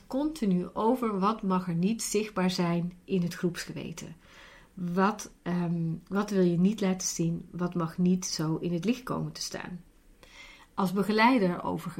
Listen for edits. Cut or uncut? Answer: uncut